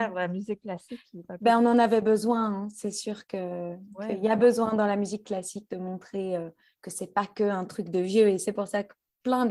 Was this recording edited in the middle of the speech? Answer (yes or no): no